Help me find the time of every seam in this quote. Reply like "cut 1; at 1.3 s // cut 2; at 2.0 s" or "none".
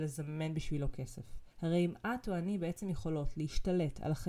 cut 1; at 1.5 s